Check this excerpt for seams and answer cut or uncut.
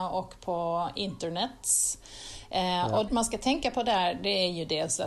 cut